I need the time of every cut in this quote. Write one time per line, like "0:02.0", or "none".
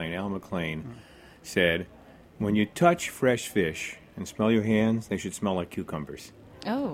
none